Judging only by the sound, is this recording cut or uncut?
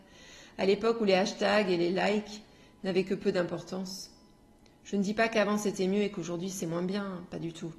uncut